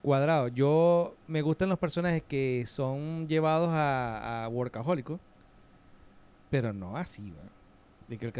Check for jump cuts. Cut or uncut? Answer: uncut